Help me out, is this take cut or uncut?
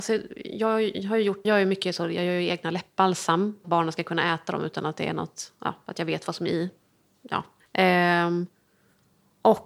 cut